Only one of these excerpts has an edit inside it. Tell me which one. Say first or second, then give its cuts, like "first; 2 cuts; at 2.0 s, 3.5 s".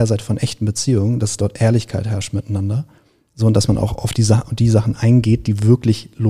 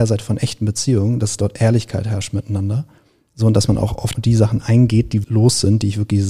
second; 2 cuts; at 4.1 s, 5.2 s